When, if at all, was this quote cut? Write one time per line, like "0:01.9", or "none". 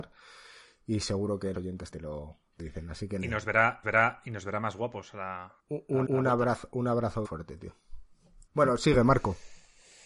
0:01.5
0:01.9
0:02.6
0:03.8
0:05.6
0:06.0
0:07.2
0:08.5